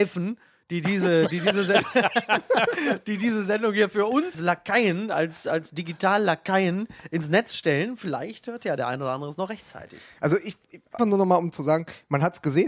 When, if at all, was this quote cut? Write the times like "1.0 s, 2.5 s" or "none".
4.3 s, 11.0 s